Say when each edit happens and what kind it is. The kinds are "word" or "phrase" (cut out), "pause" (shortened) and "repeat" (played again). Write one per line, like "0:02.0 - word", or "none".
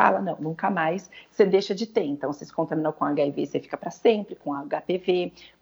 none